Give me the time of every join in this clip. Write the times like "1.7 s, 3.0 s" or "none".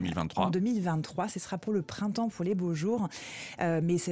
none